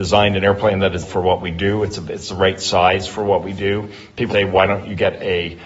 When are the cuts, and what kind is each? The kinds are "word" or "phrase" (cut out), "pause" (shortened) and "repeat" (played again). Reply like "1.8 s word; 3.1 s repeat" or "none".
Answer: 1.0 s word; 4.3 s word